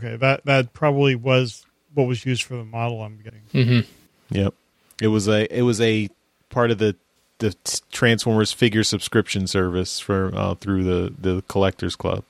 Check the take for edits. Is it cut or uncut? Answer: uncut